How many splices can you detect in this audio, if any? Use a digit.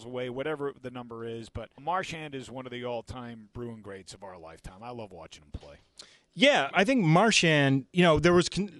3